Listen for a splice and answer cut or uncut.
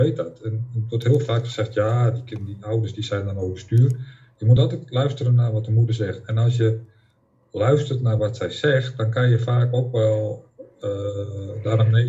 uncut